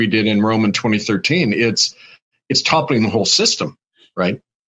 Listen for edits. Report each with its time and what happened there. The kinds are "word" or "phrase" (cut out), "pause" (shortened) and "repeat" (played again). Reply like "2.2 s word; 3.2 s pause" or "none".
none